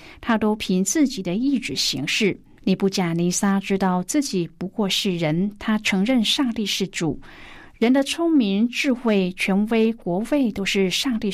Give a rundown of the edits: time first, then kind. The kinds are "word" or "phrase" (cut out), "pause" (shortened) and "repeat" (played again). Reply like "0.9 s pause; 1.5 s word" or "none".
2.6 s pause